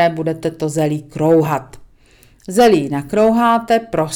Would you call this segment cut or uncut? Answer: uncut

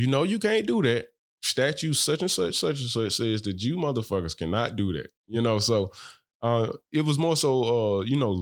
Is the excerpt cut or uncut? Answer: uncut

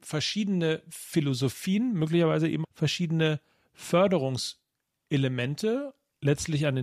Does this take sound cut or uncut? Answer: cut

